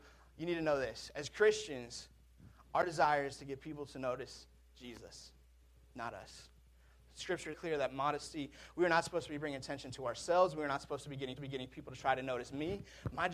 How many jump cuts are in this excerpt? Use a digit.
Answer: 2